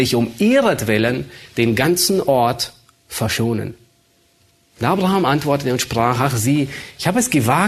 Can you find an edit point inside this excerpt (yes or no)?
no